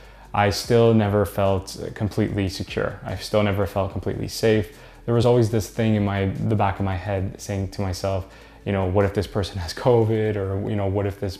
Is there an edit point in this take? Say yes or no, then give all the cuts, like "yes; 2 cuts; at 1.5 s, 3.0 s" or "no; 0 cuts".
no; 0 cuts